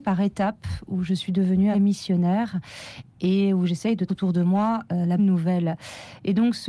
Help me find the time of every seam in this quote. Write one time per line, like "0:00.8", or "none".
0:01.7
0:04.1
0:05.2